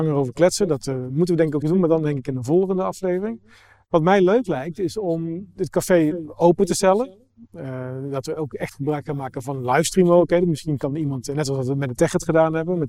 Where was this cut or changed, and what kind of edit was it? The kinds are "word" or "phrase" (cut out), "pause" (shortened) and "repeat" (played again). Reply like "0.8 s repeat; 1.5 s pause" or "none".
1.6 s word